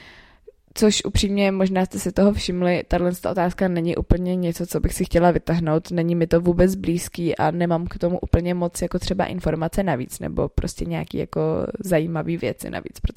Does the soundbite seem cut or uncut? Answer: uncut